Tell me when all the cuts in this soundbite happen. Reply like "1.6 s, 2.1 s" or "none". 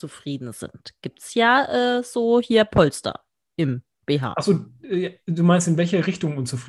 none